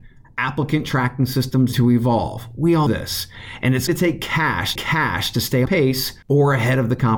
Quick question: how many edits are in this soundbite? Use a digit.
6